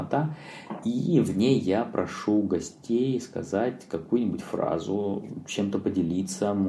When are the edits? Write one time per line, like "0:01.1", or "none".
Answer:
none